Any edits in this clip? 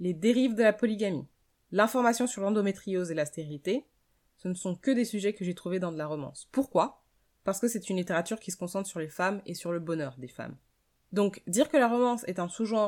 no; 0 cuts

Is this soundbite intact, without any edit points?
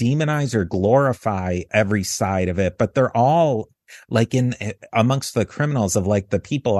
yes; 0 cuts

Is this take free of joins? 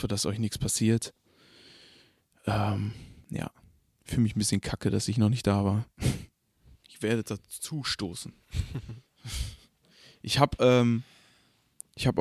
yes; 0 cuts

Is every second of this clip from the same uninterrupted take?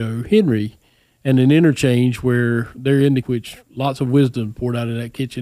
no; 1 cut; at 3.2 s

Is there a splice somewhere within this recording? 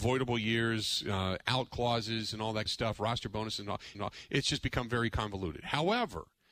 yes; 2 cuts; at 2.7 s, 3.9 s

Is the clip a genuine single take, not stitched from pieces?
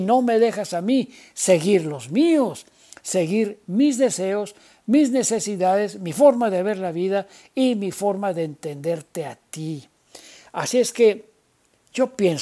yes; 0 cuts

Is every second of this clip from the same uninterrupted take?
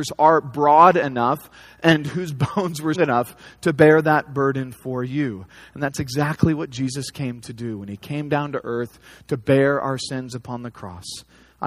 no; 1 cut; at 2.9 s

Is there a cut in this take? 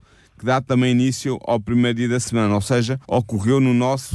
yes; 1 cut; at 3.0 s

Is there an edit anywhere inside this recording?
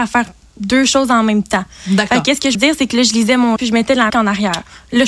yes; 3 cuts; at 2.5 s, 3.6 s, 4.1 s

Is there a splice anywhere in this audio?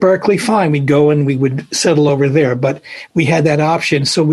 no; 0 cuts

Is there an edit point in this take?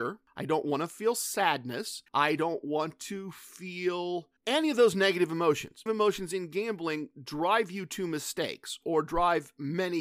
yes; 3 cuts; at 2.1 s, 4.4 s, 5.9 s

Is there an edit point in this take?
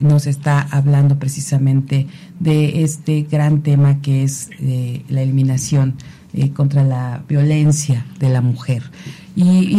no; 0 cuts

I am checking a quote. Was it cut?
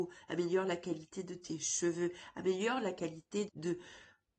yes; 1 cut; at 3.5 s

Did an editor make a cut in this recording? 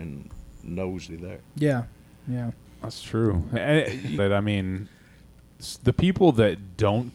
yes; 4 cuts; at 1.1 s, 2.7 s, 3.6 s, 4.2 s

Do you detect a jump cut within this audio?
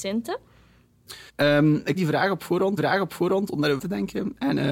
yes; 4 cuts; at 1.3 s, 2.0 s, 2.8 s, 3.8 s

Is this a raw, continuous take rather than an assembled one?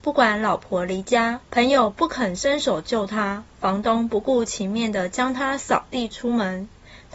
no; 2 cuts; at 1.4 s, 3.5 s

